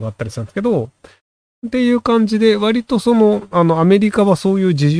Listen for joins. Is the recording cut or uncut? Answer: uncut